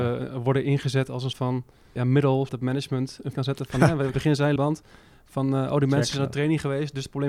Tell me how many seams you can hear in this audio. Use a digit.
6